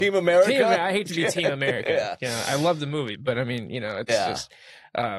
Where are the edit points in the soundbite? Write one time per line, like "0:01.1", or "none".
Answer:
none